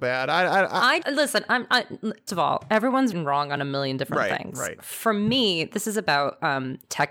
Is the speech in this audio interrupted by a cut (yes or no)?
yes